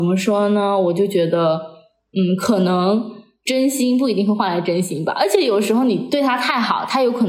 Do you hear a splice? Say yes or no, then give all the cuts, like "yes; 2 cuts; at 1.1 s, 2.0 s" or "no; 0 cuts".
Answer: no; 0 cuts